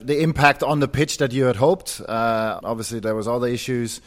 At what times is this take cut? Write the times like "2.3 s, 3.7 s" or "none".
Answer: 2.6 s